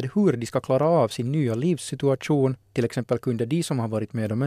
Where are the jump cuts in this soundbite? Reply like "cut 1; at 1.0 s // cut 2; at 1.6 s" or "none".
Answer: cut 1; at 2.6 s

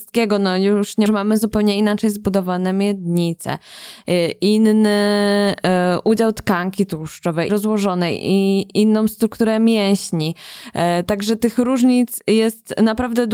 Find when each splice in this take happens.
cut 1; at 1.1 s // cut 2; at 7.5 s

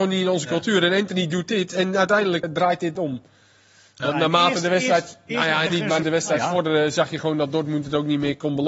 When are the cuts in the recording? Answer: cut 1; at 2.4 s // cut 2; at 3.0 s // cut 3; at 5.7 s // cut 4; at 6.0 s

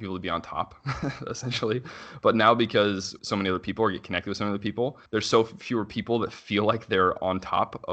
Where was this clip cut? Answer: cut 1; at 3.2 s // cut 2; at 5.1 s

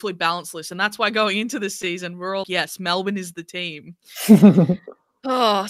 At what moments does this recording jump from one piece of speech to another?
cut 1; at 2.4 s

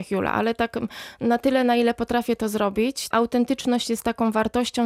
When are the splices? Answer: cut 1; at 3.1 s

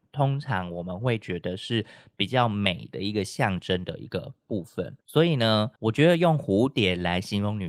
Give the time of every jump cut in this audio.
cut 1; at 5.0 s

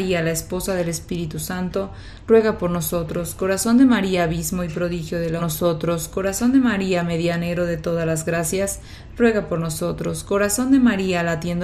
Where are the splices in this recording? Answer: cut 1; at 5.4 s

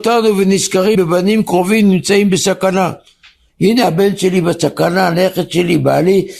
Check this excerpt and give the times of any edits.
cut 1; at 0.9 s

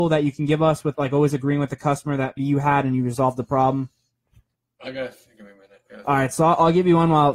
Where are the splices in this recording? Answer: cut 1; at 0.9 s // cut 2; at 2.4 s // cut 3; at 4.5 s

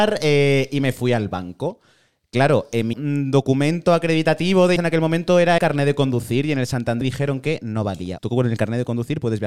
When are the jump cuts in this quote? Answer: cut 1; at 2.9 s // cut 2; at 4.8 s // cut 3; at 5.6 s // cut 4; at 7.0 s // cut 5; at 8.2 s

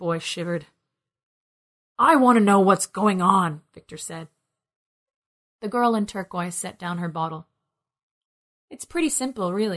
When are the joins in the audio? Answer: none

